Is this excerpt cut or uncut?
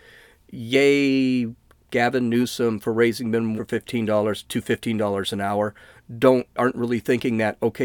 cut